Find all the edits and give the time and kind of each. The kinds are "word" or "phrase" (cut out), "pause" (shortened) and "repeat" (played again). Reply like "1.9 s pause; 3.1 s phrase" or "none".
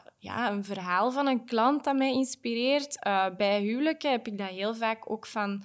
none